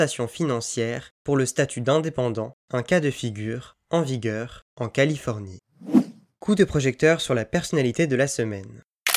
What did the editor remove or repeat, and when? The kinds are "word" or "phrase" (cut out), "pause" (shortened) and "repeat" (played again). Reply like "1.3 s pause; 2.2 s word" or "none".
none